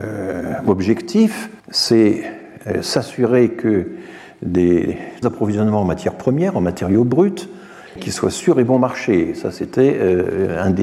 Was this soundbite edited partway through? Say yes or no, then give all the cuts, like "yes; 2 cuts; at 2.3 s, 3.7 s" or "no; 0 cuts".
yes; 3 cuts; at 1.6 s, 5.2 s, 8.0 s